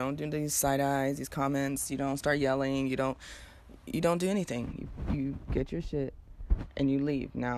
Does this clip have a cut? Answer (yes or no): no